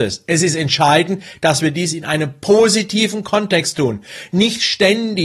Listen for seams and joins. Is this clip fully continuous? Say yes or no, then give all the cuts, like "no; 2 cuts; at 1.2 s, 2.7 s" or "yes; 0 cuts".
yes; 0 cuts